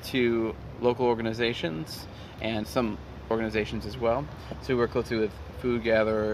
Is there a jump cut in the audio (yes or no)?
yes